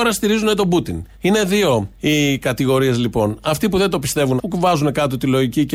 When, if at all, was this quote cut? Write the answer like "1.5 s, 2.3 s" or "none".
1.1 s, 1.9 s, 4.4 s